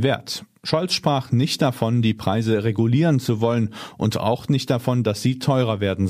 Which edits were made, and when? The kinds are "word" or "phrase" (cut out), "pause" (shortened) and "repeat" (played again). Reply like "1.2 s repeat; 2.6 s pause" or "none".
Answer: none